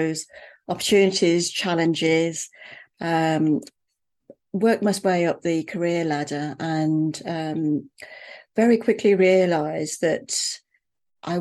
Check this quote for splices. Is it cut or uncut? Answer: uncut